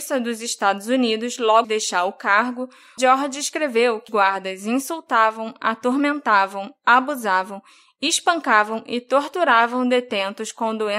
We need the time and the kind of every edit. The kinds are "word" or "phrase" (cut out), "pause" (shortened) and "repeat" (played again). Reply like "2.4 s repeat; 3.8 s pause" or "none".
1.6 s word; 3.0 s word; 4.1 s word